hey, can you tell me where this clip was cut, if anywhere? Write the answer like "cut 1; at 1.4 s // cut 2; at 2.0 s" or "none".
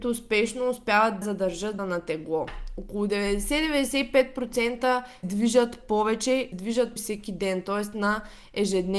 cut 1; at 1.2 s // cut 2; at 1.8 s // cut 3; at 5.2 s // cut 4; at 6.5 s // cut 5; at 7.0 s